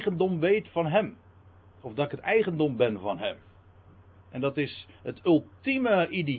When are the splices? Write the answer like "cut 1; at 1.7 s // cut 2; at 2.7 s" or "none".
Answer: cut 1; at 4.9 s